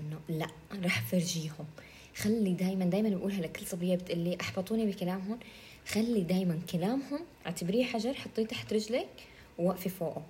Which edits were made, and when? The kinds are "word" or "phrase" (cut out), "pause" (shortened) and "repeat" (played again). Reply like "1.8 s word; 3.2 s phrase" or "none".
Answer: 7.3 s pause